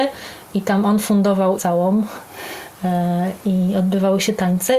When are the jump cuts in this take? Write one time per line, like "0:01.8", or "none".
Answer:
0:01.6